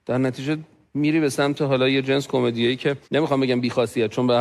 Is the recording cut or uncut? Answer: cut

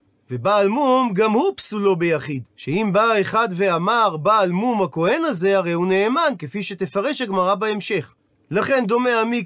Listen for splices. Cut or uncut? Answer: cut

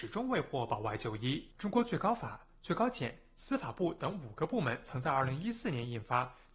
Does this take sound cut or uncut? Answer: cut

